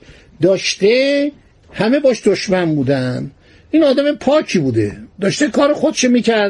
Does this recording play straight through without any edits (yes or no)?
yes